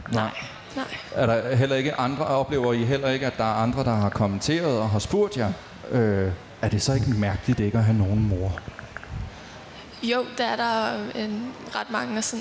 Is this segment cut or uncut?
uncut